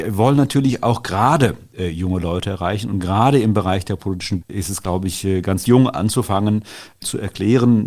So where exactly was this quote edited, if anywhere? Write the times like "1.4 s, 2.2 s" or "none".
4.4 s, 5.7 s